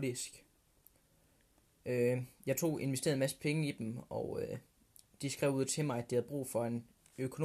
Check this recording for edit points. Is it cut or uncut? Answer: uncut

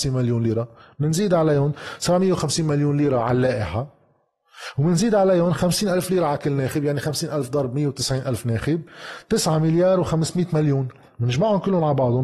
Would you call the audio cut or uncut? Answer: uncut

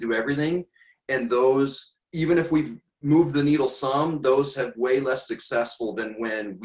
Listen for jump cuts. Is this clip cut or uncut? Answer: cut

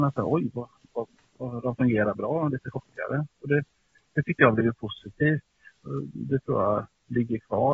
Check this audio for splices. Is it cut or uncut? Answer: uncut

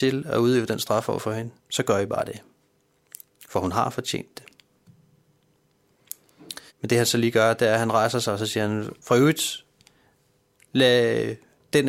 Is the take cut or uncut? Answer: cut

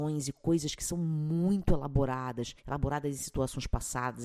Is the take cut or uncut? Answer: cut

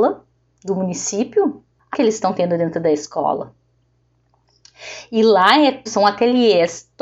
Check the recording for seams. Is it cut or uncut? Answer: cut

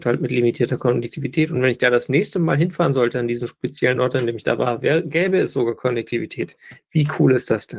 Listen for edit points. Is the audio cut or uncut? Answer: uncut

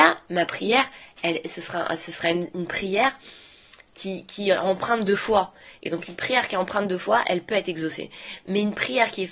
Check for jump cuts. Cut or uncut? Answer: uncut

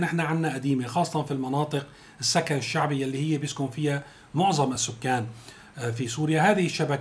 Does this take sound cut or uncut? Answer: uncut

